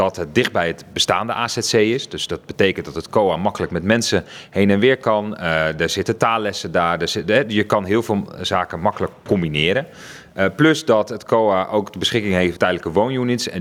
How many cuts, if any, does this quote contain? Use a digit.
1